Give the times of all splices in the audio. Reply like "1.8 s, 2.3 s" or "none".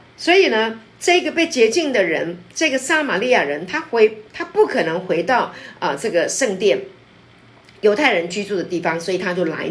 none

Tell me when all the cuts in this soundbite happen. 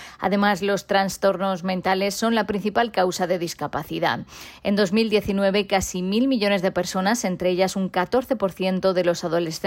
none

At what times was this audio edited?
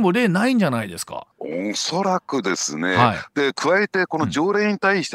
1.3 s

